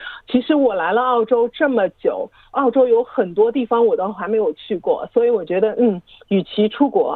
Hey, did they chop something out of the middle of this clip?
no; 0 cuts

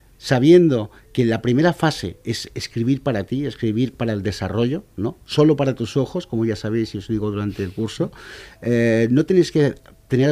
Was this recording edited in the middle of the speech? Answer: yes; 1 cut; at 2.2 s

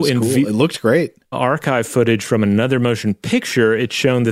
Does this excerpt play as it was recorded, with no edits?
no; 1 cut; at 1.3 s

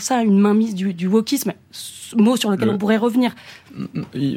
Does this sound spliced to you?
no; 0 cuts

